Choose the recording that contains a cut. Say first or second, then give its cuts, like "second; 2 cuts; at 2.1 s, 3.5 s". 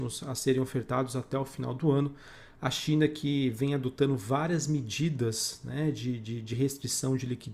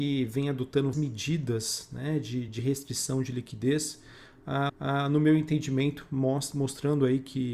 second; 3 cuts; at 0.9 s, 2.5 s, 4.7 s